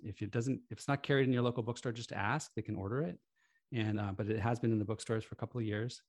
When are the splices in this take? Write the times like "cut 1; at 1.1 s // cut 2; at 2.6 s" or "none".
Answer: none